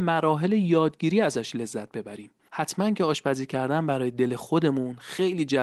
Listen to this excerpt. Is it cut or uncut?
uncut